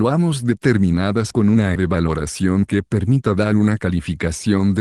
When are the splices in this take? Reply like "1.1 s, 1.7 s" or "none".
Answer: 1.3 s, 1.8 s